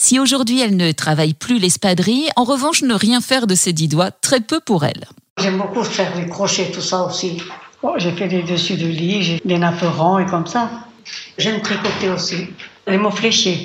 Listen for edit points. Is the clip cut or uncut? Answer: cut